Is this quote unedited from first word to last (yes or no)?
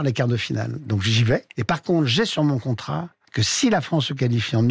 yes